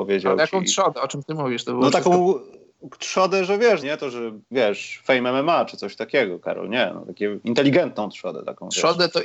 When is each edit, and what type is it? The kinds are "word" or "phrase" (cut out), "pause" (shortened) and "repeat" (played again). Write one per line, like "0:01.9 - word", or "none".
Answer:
0:03.8 - word
0:04.5 - word